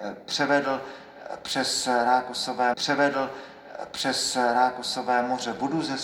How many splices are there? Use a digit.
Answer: 1